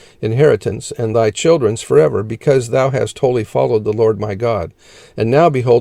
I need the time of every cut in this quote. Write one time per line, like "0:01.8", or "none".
none